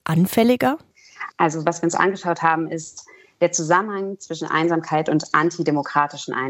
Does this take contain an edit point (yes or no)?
no